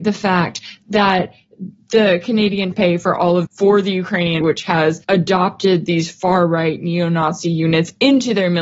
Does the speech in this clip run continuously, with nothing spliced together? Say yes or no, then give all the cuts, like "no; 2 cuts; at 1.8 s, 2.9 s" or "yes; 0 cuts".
no; 4 cuts; at 2.7 s, 3.4 s, 4.4 s, 5.0 s